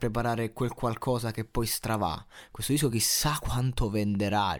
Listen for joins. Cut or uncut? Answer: uncut